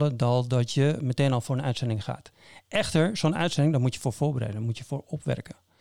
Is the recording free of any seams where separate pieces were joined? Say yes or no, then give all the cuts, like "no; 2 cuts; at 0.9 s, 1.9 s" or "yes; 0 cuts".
yes; 0 cuts